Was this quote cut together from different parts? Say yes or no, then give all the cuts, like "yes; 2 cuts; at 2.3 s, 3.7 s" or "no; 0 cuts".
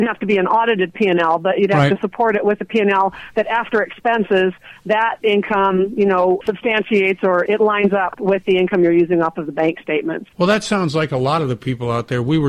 yes; 3 cuts; at 6.4 s, 7.5 s, 10.3 s